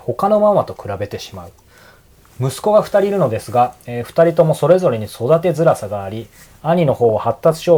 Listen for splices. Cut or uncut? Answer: uncut